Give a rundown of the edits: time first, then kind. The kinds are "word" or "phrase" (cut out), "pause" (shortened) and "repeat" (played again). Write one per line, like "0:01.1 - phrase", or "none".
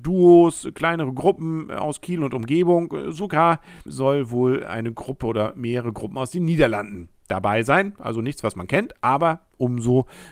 0:03.9 - word